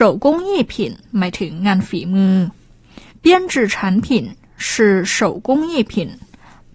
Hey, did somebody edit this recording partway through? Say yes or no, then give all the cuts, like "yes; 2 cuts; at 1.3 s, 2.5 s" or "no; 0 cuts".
yes; 2 cuts; at 1.0 s, 3.1 s